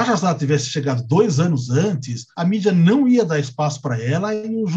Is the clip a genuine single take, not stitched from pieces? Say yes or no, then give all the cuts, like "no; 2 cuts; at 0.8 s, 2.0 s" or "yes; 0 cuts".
yes; 0 cuts